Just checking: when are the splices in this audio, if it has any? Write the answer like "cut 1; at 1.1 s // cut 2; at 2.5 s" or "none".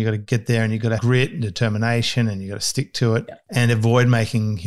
cut 1; at 1.0 s